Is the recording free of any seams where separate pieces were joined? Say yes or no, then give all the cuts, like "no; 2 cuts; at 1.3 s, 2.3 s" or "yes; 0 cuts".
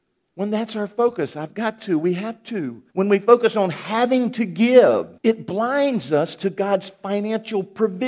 no; 2 cuts; at 2.9 s, 5.2 s